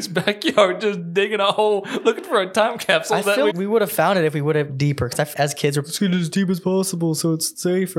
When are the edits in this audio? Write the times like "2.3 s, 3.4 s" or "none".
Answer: 3.5 s, 4.7 s, 5.3 s, 5.8 s